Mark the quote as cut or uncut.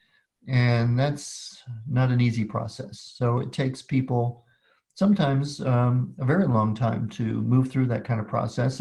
uncut